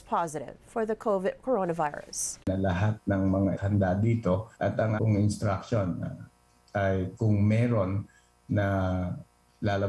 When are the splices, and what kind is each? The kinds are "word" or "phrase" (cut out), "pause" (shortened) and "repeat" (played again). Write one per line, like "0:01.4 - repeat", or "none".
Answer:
0:02.4 - pause
0:03.6 - phrase
0:04.5 - pause
0:05.0 - word